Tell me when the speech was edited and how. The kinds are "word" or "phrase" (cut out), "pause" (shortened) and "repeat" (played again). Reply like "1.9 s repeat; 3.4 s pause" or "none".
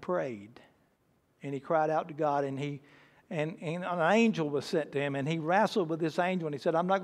none